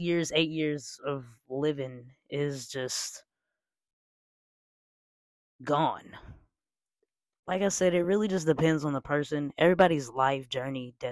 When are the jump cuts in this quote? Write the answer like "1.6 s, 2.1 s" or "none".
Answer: none